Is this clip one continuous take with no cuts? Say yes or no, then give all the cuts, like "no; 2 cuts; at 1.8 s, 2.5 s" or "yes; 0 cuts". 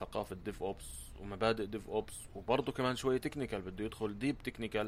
yes; 0 cuts